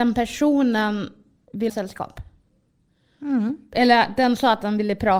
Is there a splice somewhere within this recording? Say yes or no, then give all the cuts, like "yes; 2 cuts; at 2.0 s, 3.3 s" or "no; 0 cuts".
yes; 1 cut; at 1.7 s